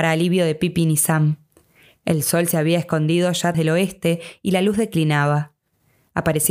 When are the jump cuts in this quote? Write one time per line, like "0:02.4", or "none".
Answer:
0:03.5